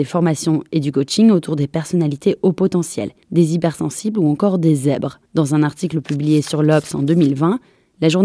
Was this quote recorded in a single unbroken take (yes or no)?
no